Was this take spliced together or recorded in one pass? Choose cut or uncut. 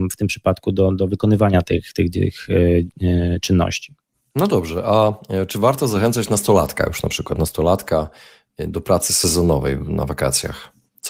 uncut